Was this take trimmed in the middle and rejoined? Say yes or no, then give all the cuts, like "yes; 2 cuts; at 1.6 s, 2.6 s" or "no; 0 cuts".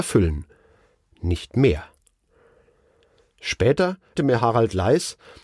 yes; 1 cut; at 4.2 s